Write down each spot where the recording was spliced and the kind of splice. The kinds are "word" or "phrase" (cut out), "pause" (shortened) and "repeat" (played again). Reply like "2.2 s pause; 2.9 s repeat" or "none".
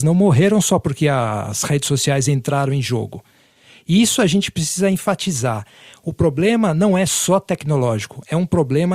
none